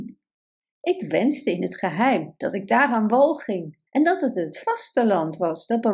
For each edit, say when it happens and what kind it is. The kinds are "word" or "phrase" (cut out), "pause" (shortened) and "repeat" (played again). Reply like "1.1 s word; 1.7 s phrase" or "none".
3.9 s pause